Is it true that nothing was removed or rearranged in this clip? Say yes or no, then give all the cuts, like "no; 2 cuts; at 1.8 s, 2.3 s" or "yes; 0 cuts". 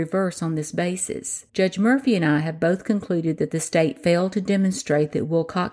no; 1 cut; at 1.5 s